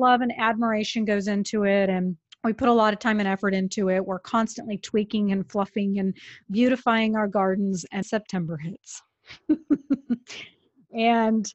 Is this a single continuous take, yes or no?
no